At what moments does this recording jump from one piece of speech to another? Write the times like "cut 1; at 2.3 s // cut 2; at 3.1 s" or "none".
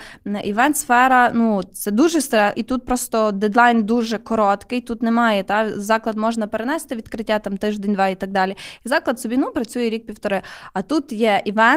cut 1; at 2.5 s